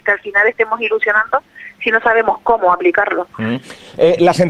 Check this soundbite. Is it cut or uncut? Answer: uncut